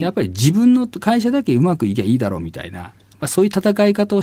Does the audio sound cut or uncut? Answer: uncut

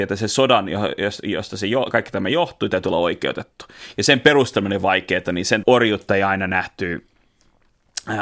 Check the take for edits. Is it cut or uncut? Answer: cut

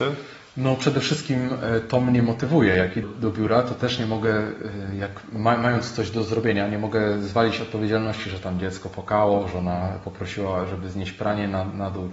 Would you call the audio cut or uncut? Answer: cut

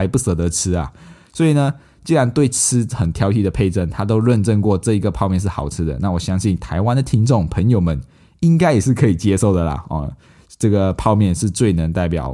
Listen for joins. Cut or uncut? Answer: uncut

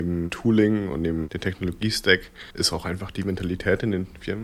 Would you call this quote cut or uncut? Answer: cut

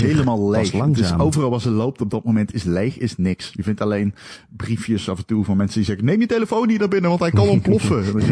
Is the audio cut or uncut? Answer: uncut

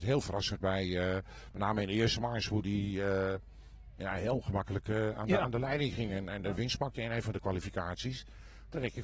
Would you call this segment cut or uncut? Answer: uncut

